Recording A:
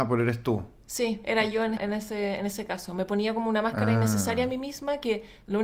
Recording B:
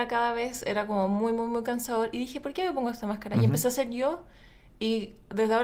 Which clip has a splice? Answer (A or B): A